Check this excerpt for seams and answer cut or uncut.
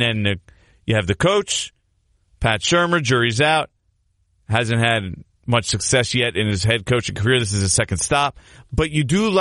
uncut